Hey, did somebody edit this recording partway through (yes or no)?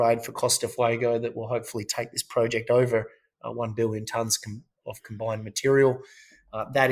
no